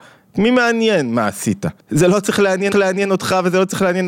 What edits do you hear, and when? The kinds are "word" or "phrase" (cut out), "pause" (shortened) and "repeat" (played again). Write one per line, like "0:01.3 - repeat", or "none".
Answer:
0:01.8 - pause
0:02.7 - repeat